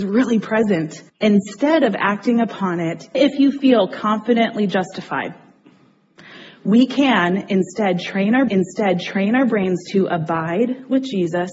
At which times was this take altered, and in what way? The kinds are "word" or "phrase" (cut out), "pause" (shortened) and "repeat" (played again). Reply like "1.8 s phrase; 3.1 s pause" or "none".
1.1 s pause; 3.1 s word; 8.5 s repeat